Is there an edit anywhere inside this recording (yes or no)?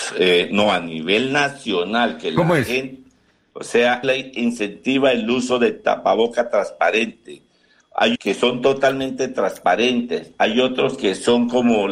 yes